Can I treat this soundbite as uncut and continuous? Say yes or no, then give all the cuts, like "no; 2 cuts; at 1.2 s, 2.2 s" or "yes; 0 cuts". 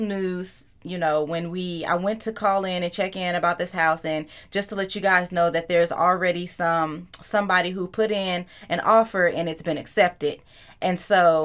yes; 0 cuts